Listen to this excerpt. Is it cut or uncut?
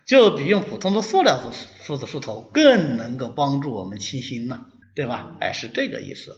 cut